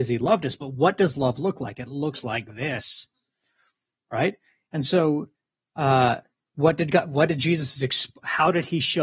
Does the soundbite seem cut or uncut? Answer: uncut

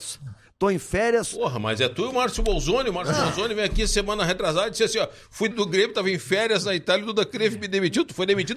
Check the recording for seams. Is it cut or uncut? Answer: cut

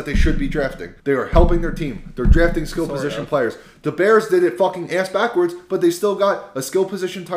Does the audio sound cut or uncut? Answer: cut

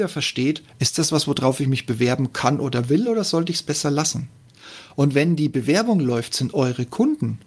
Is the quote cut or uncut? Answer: uncut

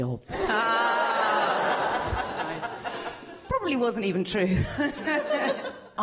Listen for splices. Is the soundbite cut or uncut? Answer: uncut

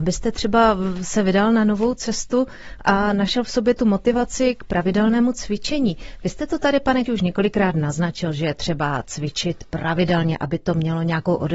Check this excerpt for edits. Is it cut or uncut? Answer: cut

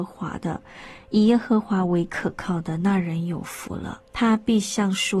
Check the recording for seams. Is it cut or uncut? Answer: cut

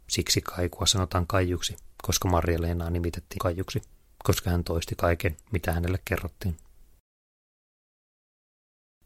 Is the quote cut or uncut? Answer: cut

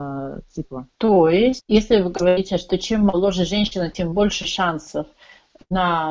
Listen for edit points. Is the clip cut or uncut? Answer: uncut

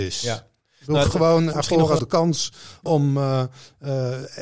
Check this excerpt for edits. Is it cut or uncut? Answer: cut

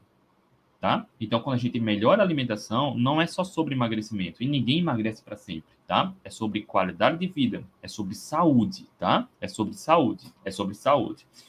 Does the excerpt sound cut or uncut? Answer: cut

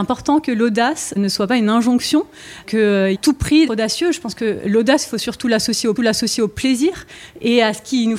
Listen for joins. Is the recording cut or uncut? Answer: cut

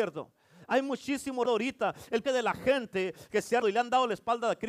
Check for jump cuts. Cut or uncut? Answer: cut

